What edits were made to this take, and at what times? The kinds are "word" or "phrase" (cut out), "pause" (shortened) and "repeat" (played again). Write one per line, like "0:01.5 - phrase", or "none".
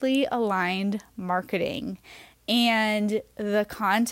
none